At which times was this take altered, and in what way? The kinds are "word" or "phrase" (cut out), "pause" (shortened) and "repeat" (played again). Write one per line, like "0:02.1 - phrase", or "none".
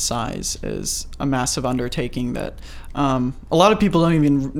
none